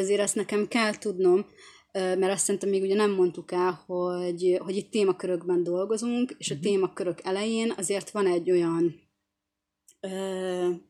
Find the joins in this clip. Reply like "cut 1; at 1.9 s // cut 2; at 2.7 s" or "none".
none